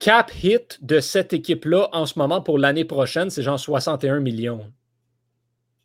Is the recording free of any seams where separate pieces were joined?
yes; 0 cuts

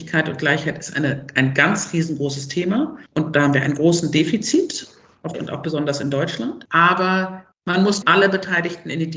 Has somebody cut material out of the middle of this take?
yes; 3 cuts; at 3.1 s, 5.3 s, 8.0 s

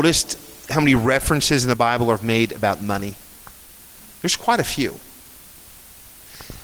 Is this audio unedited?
yes; 0 cuts

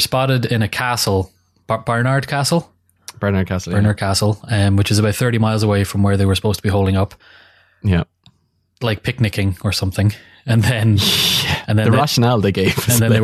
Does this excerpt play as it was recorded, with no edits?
yes; 0 cuts

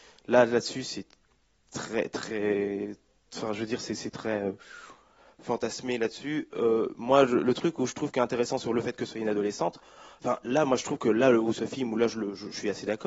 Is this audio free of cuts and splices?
yes; 0 cuts

